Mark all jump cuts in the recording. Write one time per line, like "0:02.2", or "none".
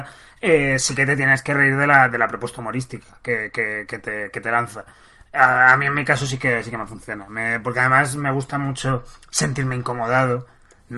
none